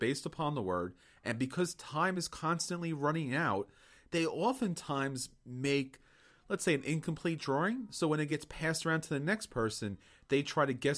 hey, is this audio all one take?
yes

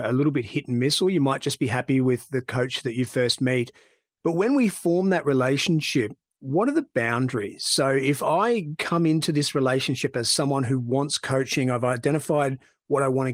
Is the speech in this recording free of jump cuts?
yes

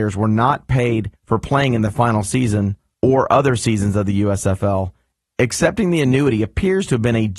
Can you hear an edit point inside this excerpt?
no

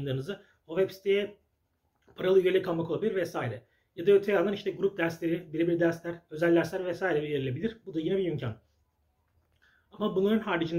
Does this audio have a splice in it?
no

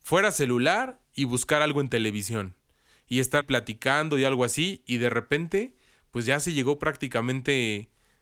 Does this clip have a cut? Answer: yes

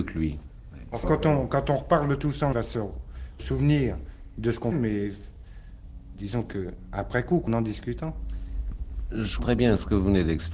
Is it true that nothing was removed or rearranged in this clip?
no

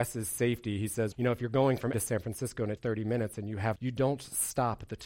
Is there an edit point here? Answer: yes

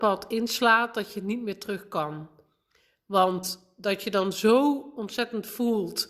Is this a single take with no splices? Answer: yes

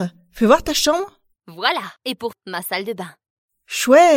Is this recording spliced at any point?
yes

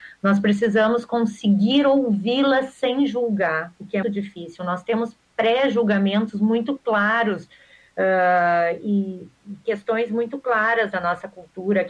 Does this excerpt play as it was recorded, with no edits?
no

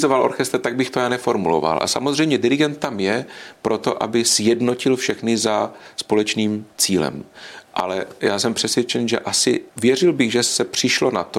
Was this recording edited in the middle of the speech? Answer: yes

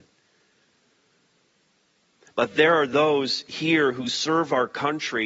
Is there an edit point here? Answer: no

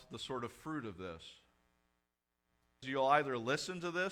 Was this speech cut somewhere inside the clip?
yes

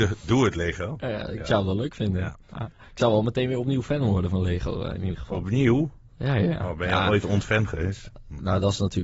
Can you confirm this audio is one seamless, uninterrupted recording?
no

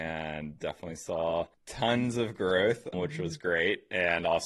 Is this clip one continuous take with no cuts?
no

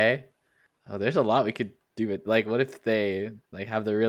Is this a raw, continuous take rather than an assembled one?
yes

